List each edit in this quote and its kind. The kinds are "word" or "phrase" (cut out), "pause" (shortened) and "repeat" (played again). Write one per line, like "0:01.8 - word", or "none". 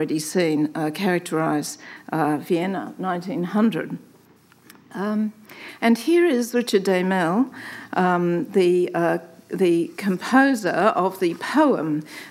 none